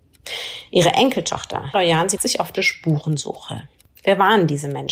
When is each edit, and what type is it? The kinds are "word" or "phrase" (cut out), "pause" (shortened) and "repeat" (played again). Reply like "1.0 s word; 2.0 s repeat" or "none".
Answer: 1.7 s word; 2.2 s word; 2.6 s word

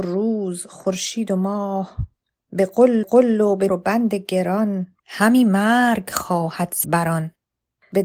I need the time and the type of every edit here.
2.2 s pause; 3.0 s repeat; 3.7 s word; 5.0 s pause; 6.8 s word

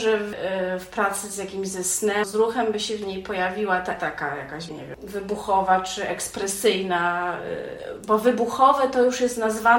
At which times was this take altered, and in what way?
2.2 s word; 4.0 s word; 4.7 s word

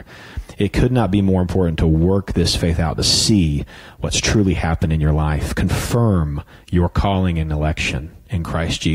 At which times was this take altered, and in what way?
none

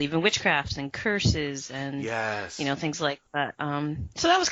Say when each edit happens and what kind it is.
3.3 s pause

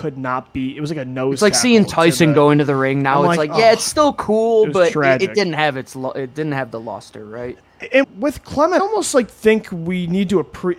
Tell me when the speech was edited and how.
8.0 s word; 8.8 s word

